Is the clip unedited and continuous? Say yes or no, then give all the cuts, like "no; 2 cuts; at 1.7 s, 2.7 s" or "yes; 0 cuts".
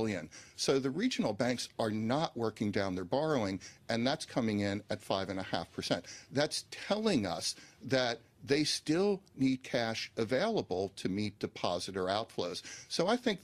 yes; 0 cuts